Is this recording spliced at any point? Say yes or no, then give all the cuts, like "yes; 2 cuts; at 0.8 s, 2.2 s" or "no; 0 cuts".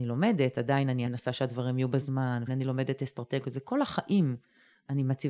yes; 2 cuts; at 1.1 s, 2.5 s